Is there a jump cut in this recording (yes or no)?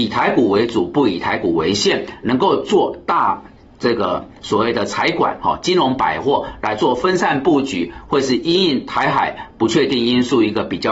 no